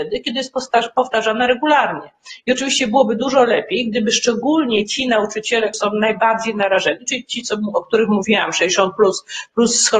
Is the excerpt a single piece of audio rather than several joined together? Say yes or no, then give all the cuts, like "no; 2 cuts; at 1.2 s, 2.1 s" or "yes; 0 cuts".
no; 1 cut; at 5.7 s